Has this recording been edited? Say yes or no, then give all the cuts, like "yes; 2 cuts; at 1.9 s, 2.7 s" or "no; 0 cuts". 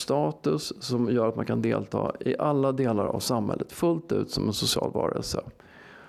no; 0 cuts